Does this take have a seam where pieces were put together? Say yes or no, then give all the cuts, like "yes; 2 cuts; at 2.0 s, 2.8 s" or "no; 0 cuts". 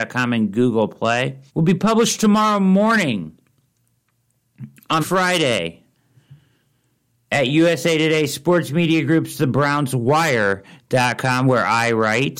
yes; 2 cuts; at 1.5 s, 5.0 s